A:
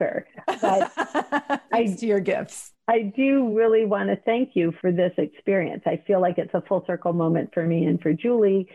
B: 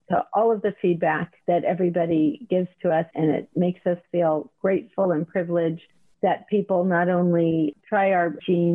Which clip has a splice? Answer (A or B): B